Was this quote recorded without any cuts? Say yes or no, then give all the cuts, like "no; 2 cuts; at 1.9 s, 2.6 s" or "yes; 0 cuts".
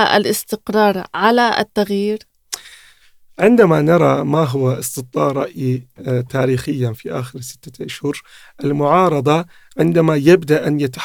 yes; 0 cuts